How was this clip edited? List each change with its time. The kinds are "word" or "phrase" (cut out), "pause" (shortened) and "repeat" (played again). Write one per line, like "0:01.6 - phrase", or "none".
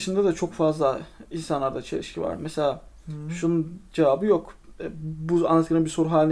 none